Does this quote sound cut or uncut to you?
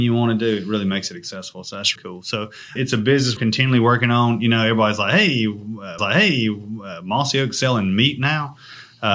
cut